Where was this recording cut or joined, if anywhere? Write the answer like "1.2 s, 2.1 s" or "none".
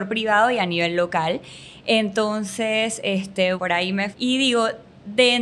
3.6 s, 4.1 s

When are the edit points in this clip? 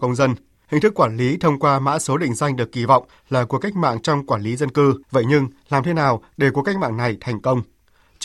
5.0 s

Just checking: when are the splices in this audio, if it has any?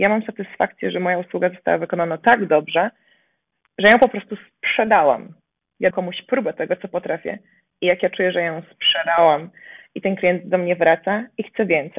5.9 s

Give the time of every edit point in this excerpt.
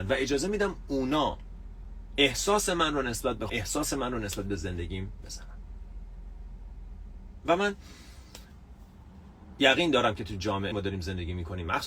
3.5 s, 5.2 s, 10.7 s

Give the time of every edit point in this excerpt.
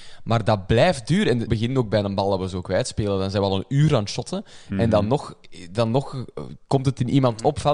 1.5 s

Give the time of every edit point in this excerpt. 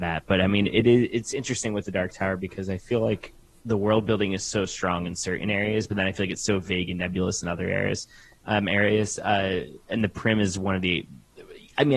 none

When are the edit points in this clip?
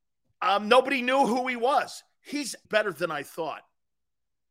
2.6 s

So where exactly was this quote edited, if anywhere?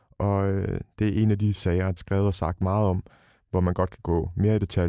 2.0 s

